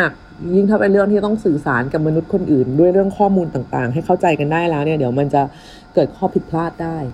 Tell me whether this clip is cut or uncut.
uncut